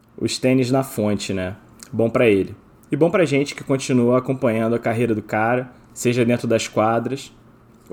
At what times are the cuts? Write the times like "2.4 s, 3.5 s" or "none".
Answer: none